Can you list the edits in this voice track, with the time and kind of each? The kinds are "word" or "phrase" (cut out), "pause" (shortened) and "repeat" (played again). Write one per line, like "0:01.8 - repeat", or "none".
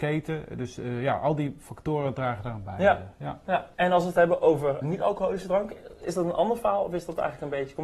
0:03.7 - pause
0:04.8 - word